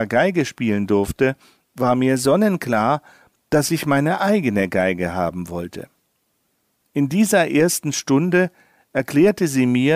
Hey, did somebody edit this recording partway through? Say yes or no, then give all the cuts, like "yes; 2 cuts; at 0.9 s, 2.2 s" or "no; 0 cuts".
no; 0 cuts